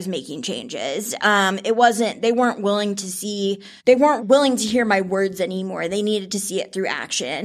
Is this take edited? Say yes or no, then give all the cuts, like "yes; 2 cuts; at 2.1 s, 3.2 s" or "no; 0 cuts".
yes; 2 cuts; at 3.8 s, 4.2 s